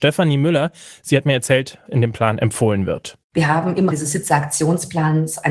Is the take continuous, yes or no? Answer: no